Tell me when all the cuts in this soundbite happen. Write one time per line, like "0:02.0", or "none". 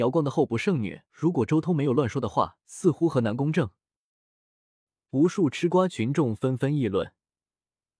0:01.1
0:02.6